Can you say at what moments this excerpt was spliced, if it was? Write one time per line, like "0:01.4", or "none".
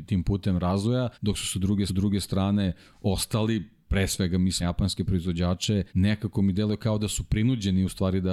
0:01.1
0:01.9
0:04.6
0:05.9